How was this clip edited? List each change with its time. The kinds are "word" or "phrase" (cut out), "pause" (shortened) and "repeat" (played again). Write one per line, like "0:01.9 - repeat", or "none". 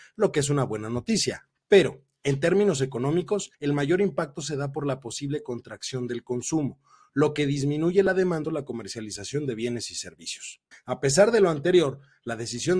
0:03.5 - pause
0:08.4 - phrase
0:10.7 - pause